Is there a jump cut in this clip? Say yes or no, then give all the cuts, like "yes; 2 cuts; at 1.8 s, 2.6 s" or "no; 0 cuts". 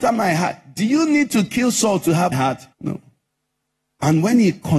yes; 2 cuts; at 2.3 s, 2.7 s